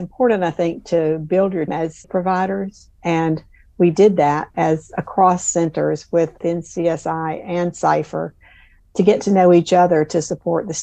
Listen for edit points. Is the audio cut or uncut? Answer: cut